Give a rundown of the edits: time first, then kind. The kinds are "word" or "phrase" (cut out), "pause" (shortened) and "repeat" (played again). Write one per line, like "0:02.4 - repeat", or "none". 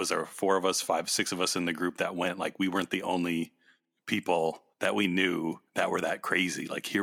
0:04.7 - pause
0:05.7 - pause